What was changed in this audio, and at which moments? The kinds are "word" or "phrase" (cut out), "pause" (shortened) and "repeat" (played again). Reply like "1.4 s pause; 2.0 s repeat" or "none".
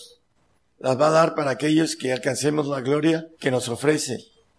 3.3 s pause